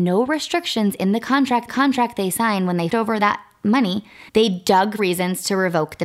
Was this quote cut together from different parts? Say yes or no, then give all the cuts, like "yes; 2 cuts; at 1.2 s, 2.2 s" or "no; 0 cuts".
yes; 4 cuts; at 1.7 s, 2.9 s, 4.3 s, 5.0 s